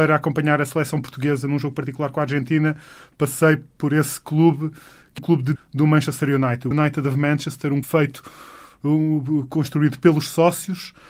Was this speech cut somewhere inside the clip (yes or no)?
yes